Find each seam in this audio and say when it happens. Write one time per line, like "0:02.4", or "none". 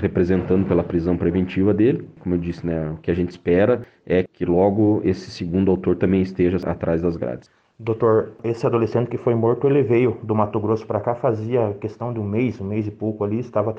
none